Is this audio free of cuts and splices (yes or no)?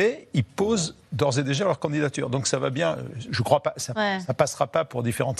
no